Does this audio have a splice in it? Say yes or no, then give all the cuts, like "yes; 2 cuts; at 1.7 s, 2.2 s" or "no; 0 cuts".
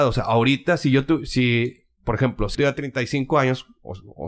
yes; 1 cut; at 2.5 s